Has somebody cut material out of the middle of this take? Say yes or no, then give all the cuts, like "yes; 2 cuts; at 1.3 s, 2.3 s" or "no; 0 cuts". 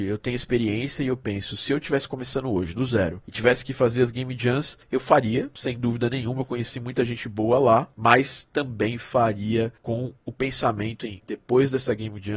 no; 0 cuts